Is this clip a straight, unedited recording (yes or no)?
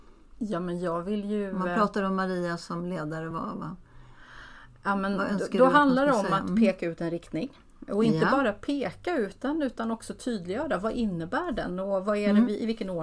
yes